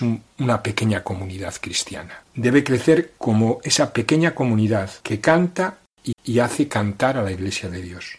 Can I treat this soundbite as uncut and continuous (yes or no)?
no